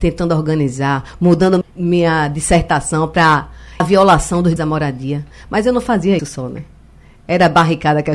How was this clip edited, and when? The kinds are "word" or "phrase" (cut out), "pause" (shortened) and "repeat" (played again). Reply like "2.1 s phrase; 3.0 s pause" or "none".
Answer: 1.6 s word; 3.8 s word; 4.6 s word; 6.2 s word